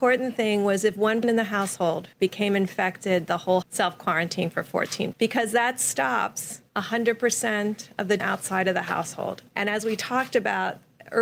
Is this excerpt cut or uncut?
cut